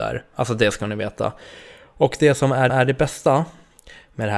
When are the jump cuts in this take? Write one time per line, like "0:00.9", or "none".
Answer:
0:02.7